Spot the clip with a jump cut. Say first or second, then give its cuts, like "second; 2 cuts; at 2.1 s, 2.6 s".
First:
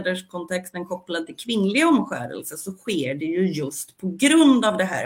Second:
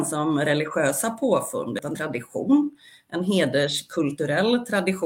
second; 1 cut; at 1.9 s